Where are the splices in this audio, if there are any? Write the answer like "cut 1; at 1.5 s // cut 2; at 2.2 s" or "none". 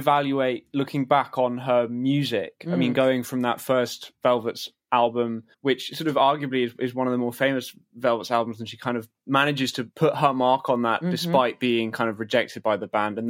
cut 1; at 5.5 s